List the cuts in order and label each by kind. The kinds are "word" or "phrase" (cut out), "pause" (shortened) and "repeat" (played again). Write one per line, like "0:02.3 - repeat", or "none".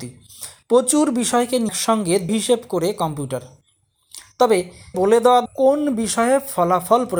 0:01.7 - word
0:02.3 - word
0:04.9 - word
0:05.5 - word